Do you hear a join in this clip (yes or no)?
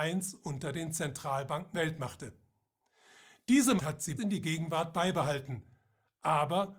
yes